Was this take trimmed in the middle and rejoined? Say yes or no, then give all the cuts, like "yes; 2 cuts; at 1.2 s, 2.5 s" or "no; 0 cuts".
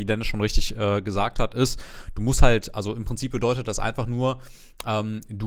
no; 0 cuts